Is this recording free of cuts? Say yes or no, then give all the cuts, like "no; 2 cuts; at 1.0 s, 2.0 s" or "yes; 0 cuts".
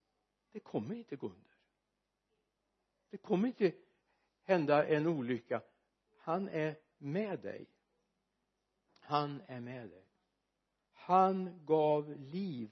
yes; 0 cuts